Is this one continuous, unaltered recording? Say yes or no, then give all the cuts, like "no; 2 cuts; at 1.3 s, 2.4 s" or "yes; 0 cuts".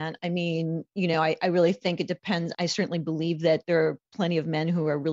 yes; 0 cuts